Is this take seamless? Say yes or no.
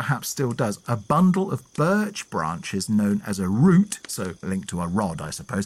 no